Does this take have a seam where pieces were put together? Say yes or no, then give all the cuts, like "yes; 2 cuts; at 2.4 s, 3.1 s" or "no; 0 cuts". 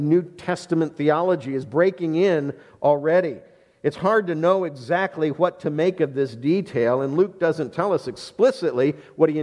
no; 0 cuts